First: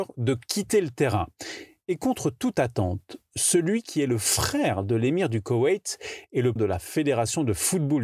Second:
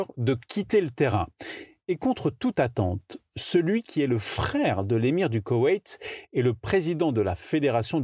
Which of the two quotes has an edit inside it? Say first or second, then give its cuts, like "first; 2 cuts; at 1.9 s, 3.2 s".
first; 1 cut; at 6.6 s